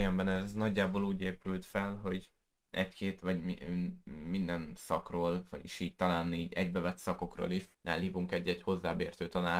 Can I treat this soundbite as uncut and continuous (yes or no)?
no